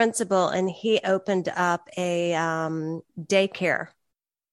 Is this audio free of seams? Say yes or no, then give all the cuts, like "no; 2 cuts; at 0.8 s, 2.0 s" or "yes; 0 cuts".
no; 1 cut; at 3.1 s